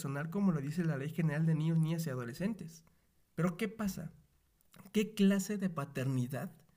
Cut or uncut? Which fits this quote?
cut